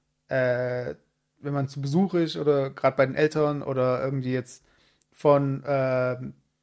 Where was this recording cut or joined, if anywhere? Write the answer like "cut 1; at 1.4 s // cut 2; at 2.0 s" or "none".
none